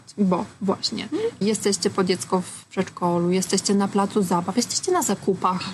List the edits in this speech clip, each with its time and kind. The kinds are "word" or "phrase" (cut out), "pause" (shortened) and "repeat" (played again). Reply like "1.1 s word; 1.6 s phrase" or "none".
none